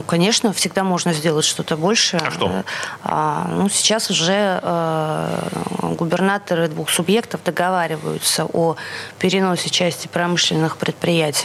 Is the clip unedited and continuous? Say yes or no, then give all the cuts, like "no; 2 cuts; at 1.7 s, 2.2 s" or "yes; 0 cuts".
yes; 0 cuts